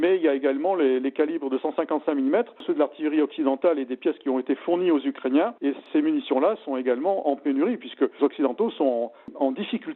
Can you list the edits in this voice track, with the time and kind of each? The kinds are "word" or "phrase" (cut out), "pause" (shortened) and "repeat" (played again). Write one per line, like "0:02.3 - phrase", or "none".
0:05.6 - pause
0:08.2 - word